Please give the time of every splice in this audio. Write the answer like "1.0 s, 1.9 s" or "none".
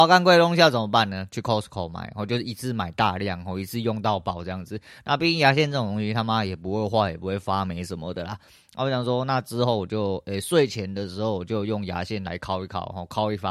none

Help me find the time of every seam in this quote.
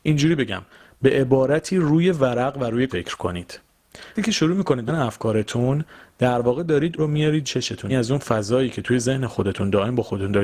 2.9 s, 4.1 s, 4.9 s, 7.0 s, 7.4 s, 7.9 s

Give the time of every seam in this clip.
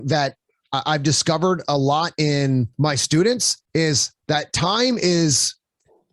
2.7 s, 3.7 s

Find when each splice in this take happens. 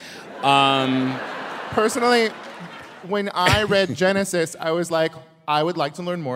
none

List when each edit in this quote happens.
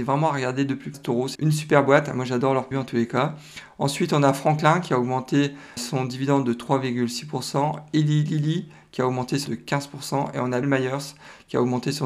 0.9 s, 1.4 s, 2.7 s, 5.8 s, 9.5 s, 10.6 s

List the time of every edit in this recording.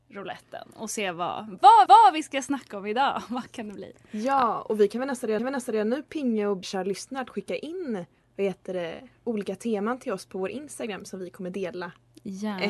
1.9 s, 5.4 s, 6.6 s, 8.2 s

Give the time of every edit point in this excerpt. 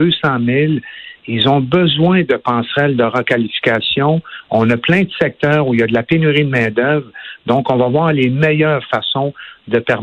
none

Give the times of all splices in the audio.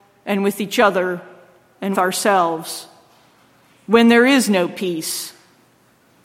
1.9 s

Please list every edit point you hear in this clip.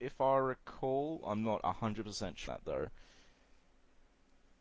2.5 s

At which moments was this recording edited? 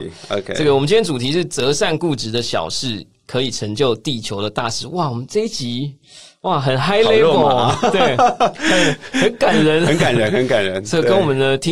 none

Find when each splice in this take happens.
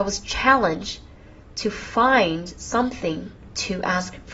none

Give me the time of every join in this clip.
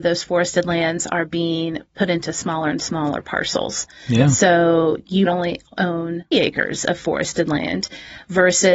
5.3 s, 6.3 s

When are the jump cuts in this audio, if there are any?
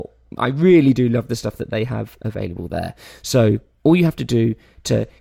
none

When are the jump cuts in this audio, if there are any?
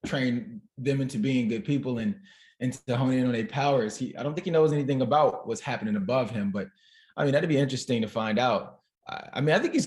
none

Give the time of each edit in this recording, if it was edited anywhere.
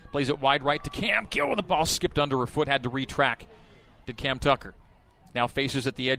none

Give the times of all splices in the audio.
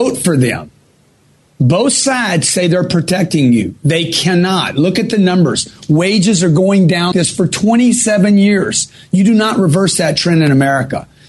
7.1 s

